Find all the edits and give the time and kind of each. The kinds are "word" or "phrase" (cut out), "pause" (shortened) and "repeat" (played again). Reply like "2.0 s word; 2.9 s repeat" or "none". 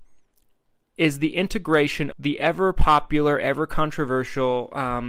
2.1 s word